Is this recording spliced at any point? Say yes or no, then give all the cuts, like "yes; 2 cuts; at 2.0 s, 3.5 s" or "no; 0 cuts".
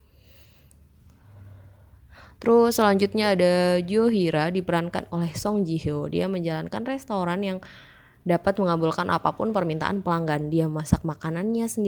no; 0 cuts